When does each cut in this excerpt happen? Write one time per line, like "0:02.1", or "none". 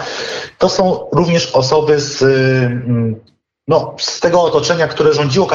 none